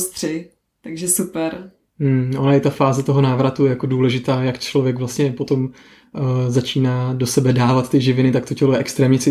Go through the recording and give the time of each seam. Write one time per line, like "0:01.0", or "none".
none